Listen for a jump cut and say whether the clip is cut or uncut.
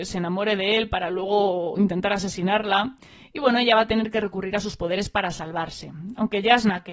uncut